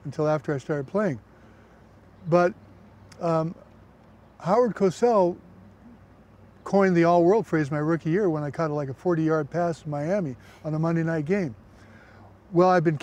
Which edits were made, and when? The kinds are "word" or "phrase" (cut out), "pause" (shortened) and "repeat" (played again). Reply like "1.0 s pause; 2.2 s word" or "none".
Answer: none